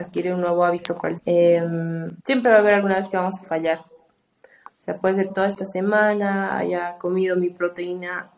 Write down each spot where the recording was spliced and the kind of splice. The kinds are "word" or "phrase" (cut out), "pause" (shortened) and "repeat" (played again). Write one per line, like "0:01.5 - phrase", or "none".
0:01.2 - word
0:02.2 - pause
0:05.3 - phrase